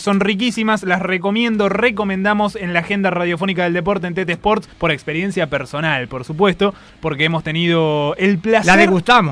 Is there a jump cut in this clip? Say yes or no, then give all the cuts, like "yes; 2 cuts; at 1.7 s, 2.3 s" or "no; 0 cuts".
yes; 1 cut; at 4.7 s